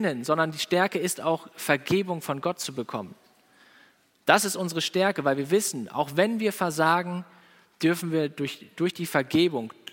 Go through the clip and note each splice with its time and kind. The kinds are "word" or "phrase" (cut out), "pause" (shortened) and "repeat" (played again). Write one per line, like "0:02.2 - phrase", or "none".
none